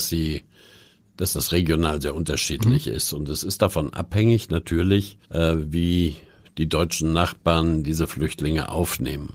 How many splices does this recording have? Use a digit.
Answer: 1